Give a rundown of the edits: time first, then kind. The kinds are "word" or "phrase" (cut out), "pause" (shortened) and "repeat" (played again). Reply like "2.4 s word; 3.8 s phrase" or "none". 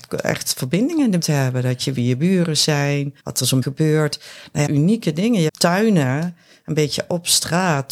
1.2 s word; 1.9 s word; 3.2 s pause; 3.6 s word; 4.7 s phrase; 5.5 s phrase